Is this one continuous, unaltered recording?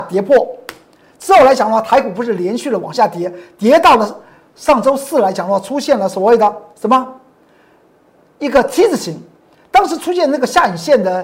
yes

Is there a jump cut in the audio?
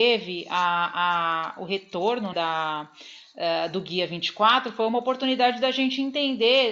yes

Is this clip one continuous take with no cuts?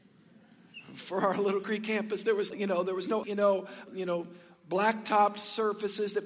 no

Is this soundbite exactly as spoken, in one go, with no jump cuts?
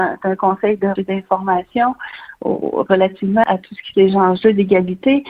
no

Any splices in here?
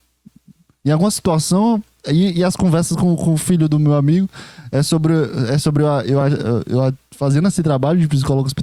no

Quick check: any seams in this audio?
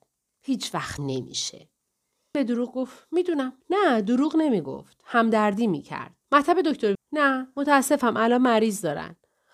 yes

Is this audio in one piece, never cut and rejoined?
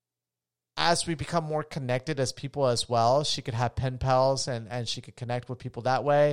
yes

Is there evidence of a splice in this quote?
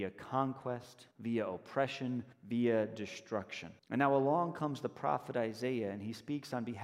yes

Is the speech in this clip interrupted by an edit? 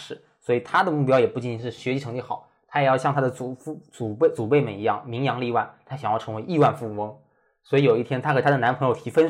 no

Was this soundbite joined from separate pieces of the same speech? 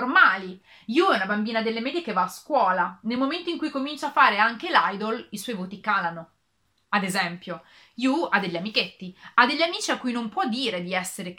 no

